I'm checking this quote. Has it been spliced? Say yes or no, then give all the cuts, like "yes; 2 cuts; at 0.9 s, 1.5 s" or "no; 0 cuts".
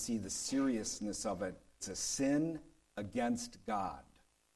yes; 1 cut; at 1.8 s